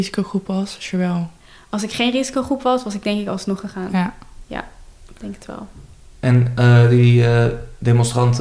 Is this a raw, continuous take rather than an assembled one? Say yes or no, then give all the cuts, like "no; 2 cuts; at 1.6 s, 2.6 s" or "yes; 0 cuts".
no; 1 cut; at 1.4 s